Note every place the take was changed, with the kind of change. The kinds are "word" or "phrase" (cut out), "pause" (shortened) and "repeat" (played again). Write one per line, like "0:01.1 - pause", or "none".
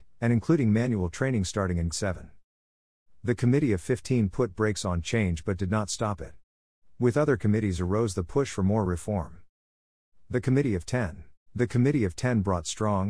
0:01.9 - word
0:11.5 - pause